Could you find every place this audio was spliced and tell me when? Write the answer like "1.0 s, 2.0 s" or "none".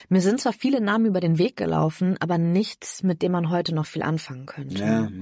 none